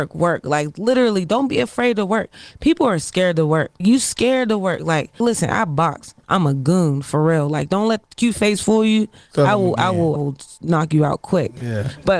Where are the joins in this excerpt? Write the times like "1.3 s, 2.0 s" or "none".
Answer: 3.8 s, 5.2 s, 8.0 s, 10.2 s